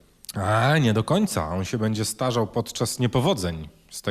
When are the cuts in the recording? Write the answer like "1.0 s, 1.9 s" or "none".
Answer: none